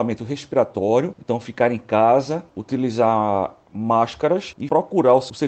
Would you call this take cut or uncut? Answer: uncut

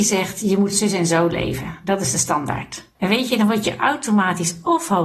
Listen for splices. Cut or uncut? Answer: cut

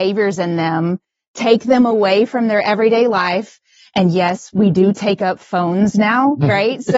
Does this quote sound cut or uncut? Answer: uncut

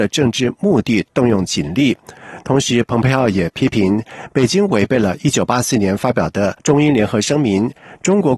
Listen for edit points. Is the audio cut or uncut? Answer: cut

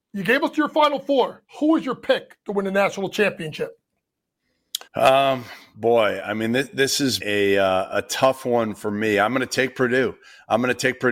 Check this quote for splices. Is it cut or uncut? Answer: cut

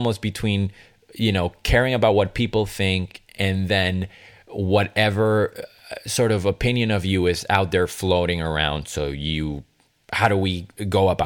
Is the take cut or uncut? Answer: uncut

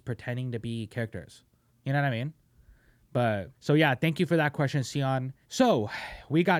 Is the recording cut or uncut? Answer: cut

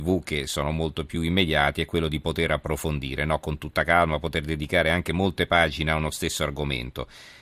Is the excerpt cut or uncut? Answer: uncut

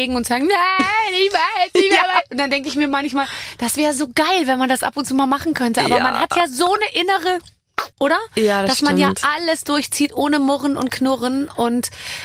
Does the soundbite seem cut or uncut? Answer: cut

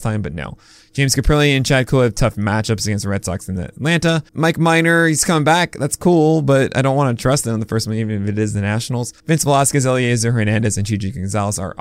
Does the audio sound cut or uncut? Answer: cut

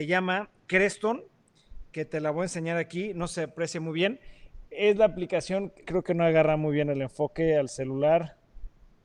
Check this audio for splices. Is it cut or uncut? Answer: cut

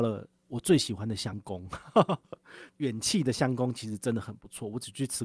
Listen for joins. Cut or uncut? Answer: uncut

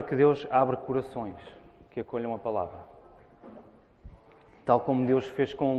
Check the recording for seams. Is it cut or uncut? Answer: uncut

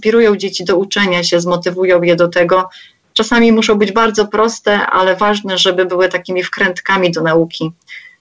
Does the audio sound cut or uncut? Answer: uncut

